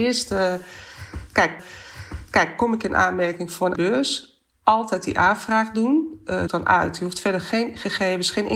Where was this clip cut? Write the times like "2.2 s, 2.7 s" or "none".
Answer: 1.6 s, 3.7 s, 6.5 s